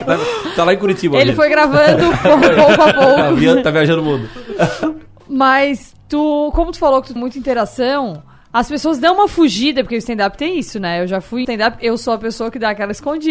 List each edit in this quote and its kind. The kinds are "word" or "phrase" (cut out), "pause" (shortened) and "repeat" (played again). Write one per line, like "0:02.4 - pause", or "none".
0:07.2 - word
0:11.4 - phrase